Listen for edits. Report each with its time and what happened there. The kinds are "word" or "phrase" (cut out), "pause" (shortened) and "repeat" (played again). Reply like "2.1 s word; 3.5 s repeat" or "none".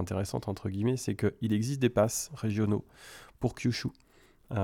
none